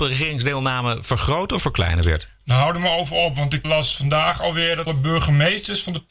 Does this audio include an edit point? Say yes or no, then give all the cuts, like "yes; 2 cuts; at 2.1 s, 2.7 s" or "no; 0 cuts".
yes; 2 cuts; at 3.6 s, 4.9 s